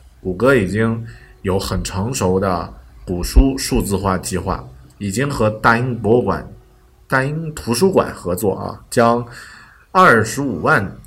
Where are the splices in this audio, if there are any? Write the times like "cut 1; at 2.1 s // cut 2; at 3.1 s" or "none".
none